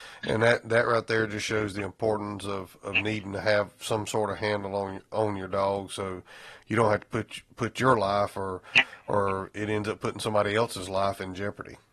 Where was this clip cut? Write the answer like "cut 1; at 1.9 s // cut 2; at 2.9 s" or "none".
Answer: none